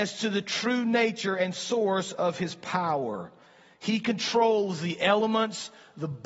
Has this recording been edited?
no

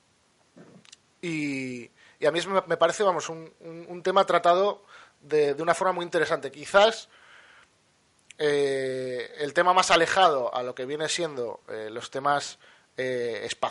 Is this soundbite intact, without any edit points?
yes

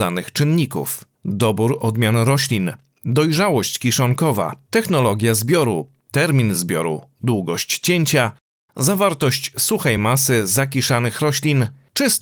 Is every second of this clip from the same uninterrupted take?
yes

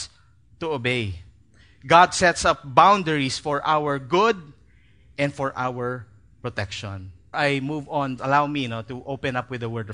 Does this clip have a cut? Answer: yes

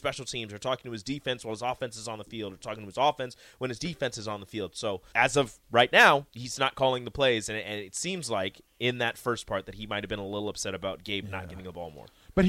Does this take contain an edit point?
yes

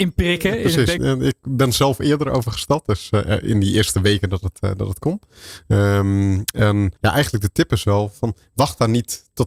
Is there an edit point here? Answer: yes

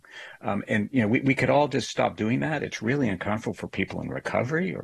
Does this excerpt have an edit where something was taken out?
no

